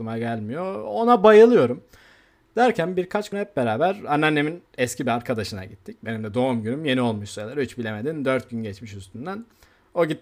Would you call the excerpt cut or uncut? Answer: cut